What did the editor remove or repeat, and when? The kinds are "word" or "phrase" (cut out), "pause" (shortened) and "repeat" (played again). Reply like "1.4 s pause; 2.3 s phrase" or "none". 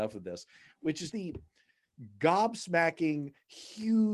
1.1 s word